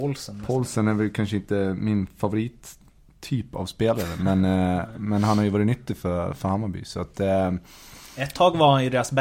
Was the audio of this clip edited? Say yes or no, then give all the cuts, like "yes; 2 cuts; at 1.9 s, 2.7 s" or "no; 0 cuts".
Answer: no; 0 cuts